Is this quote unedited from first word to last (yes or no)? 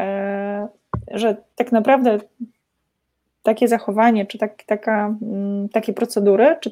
yes